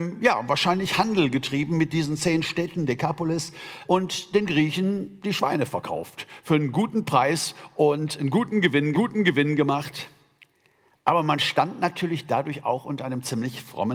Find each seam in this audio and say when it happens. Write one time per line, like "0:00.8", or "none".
0:03.8
0:08.9